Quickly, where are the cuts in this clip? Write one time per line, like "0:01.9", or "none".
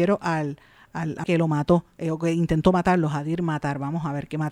0:01.2